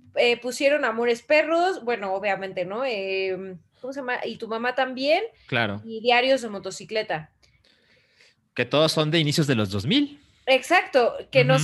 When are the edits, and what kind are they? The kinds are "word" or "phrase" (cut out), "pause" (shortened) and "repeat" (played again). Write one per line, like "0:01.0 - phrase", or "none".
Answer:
none